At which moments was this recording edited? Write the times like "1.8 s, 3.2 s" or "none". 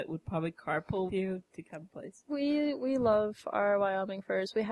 1.1 s, 1.9 s